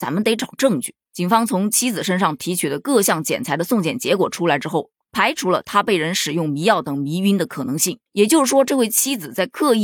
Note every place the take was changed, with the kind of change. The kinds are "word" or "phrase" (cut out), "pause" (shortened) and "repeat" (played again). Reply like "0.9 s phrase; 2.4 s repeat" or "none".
8.1 s pause